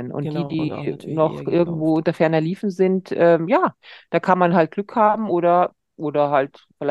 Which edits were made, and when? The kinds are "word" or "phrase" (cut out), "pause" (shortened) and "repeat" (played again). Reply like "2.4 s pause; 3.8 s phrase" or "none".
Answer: none